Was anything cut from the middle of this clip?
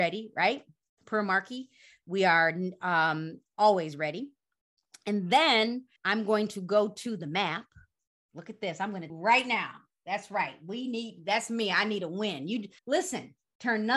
yes; 3 cuts; at 6.0 s, 9.1 s, 12.8 s

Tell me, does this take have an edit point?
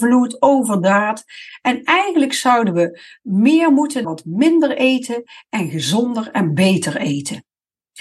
yes; 1 cut; at 4.0 s

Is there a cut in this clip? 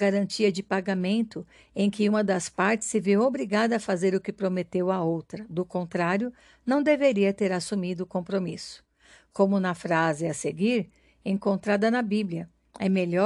no; 0 cuts

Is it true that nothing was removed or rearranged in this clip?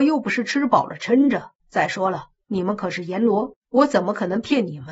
no; 2 cuts; at 1.6 s, 3.6 s

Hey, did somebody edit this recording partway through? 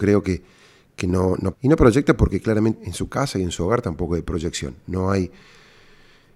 yes; 2 cuts; at 1.5 s, 2.8 s

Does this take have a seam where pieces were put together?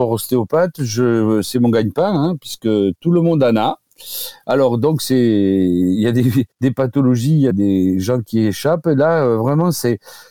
yes; 2 cuts; at 6.5 s, 7.5 s

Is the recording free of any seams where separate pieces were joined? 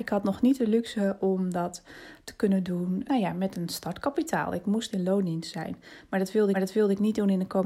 no; 2 cuts; at 3.1 s, 6.5 s

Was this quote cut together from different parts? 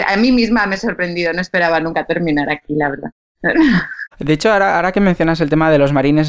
yes; 1 cut; at 4.1 s

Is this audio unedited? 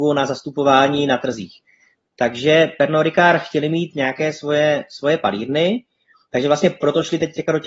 yes; 0 cuts

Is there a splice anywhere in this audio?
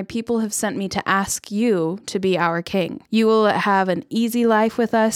yes; 1 cut; at 3.1 s

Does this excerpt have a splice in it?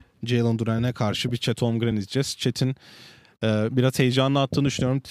no; 0 cuts

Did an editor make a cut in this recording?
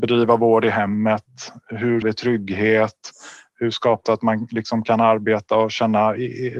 yes; 2 cuts; at 2.0 s, 4.1 s

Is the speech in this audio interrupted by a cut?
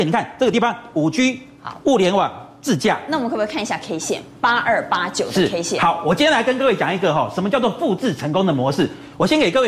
no; 0 cuts

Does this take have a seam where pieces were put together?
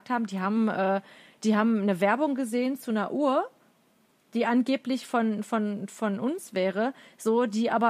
no; 0 cuts

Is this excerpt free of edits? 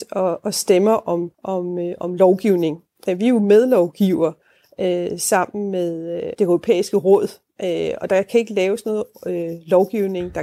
no; 2 cuts; at 1.3 s, 6.3 s

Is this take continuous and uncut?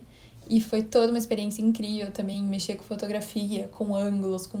yes; 0 cuts

